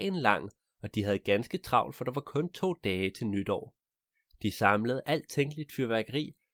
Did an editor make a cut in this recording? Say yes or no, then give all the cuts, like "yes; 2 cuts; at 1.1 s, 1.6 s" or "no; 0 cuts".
no; 0 cuts